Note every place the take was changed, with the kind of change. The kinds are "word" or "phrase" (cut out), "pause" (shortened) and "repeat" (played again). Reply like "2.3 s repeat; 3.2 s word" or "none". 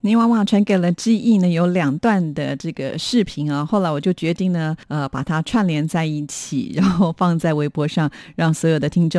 4.8 s pause